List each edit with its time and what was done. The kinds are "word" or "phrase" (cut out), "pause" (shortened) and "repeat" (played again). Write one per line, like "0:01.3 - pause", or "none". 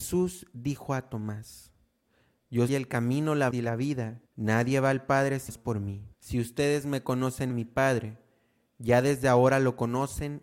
0:02.7 - word
0:03.5 - word
0:04.3 - pause
0:05.5 - word
0:06.1 - pause
0:07.5 - phrase

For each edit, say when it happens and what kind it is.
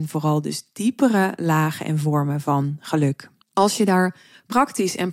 0:03.4 - pause

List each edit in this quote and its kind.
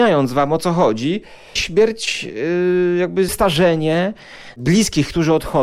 0:01.6 - word
0:03.3 - word

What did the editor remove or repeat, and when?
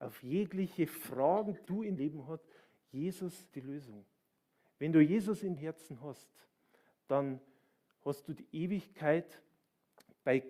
0:01.6 - word
0:02.0 - word
0:03.5 - word
0:05.6 - word

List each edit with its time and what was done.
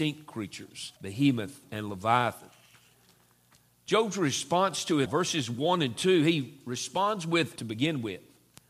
0:01.0 - pause
0:05.1 - word
0:07.6 - word

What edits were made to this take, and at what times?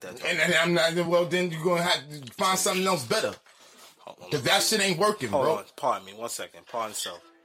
none

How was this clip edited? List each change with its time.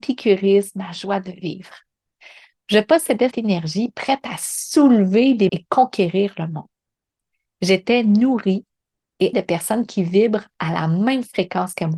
0:03.3 - word
0:05.5 - word
0:09.3 - word

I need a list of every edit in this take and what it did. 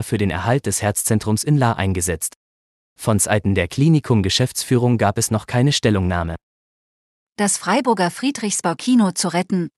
none

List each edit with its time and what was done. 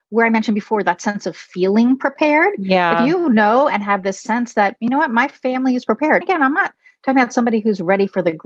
0:06.2 - word

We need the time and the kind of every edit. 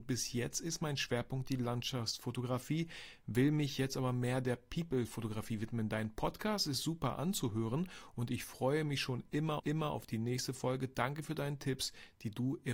0:09.6 - repeat

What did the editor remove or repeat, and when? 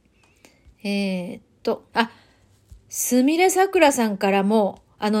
0:01.9 - pause

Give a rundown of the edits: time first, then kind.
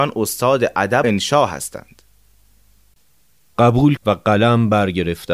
0:01.0 - word
0:04.0 - word

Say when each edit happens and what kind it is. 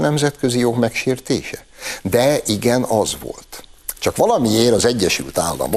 none

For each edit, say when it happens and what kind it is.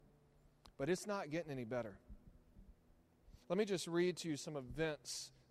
0:03.4 - pause

